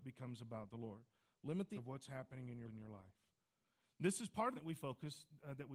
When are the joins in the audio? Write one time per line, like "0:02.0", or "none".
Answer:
0:01.8
0:02.6
0:04.6